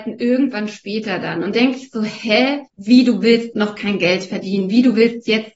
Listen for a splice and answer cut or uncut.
cut